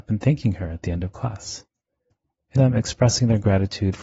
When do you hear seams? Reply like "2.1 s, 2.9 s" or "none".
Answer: 2.6 s